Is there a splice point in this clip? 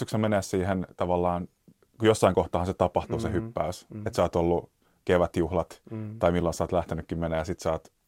no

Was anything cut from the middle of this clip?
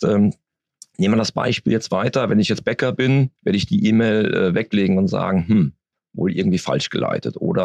yes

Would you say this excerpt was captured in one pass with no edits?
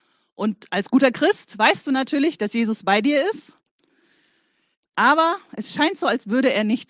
yes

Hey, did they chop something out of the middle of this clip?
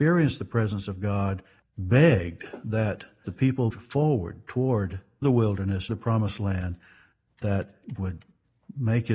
yes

